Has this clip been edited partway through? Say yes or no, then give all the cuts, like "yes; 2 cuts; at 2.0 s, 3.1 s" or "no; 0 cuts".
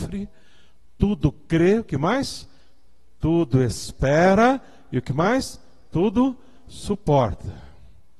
no; 0 cuts